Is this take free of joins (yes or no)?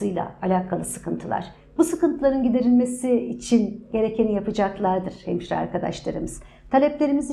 yes